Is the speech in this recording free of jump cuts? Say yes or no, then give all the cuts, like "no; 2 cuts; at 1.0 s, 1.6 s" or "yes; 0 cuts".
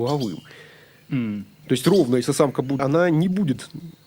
no; 1 cut; at 2.8 s